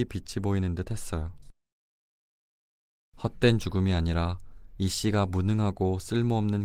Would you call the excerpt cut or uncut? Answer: uncut